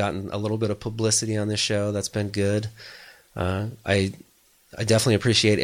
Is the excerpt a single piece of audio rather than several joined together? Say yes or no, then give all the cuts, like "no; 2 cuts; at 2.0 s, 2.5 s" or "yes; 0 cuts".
yes; 0 cuts